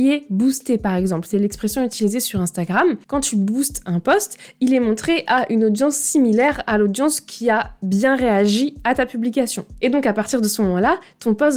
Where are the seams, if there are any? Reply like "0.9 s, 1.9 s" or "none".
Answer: 3.0 s